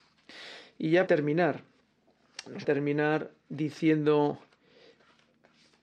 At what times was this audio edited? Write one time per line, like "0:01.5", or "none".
0:01.1
0:02.6